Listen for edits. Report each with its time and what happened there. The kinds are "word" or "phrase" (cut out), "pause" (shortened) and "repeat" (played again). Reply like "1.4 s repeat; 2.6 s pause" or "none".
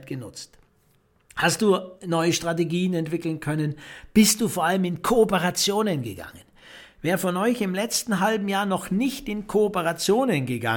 none